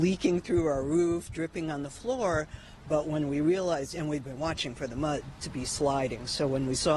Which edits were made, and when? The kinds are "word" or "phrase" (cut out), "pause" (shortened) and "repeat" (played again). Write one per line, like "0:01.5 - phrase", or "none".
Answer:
0:01.3 - word